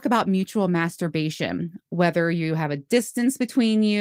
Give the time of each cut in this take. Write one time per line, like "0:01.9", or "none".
none